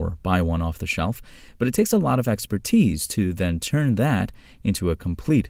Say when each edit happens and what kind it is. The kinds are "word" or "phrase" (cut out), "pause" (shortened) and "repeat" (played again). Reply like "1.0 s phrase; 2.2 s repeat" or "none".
none